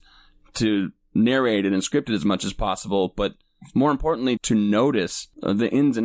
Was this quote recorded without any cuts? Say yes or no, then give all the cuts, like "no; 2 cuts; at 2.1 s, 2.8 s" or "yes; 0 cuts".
no; 1 cut; at 4.4 s